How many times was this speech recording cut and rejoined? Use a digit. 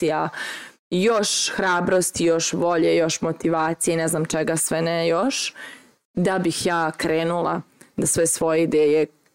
0